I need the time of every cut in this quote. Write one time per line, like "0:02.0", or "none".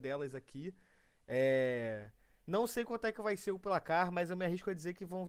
none